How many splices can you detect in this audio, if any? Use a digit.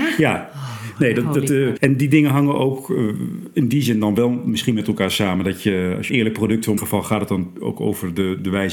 3